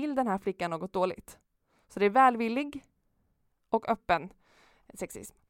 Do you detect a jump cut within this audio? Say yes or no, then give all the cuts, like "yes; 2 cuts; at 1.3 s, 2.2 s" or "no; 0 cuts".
no; 0 cuts